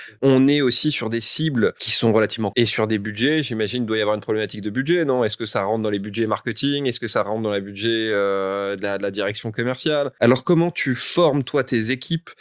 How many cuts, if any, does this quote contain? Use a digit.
1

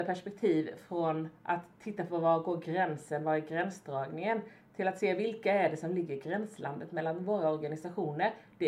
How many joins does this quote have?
0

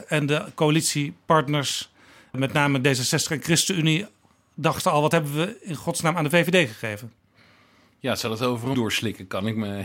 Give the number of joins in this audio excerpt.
1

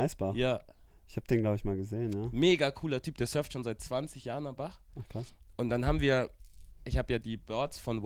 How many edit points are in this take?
0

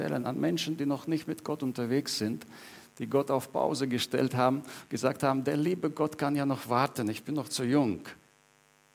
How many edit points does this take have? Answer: 0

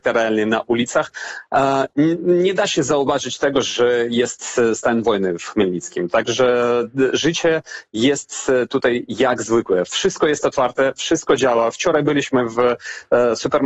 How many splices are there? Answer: 0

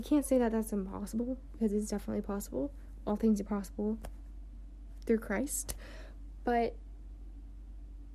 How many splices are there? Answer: 0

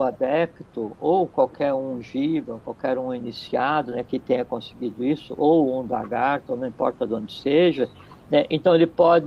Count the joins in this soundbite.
0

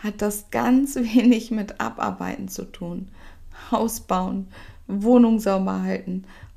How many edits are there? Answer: 0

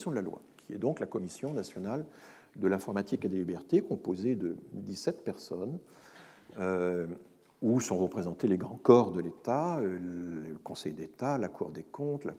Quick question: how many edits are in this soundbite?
0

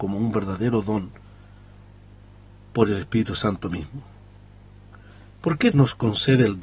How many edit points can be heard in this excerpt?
1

